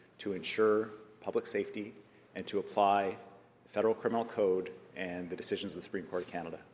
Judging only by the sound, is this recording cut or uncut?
uncut